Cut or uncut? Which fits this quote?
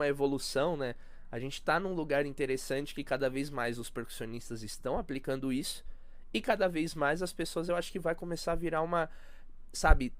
uncut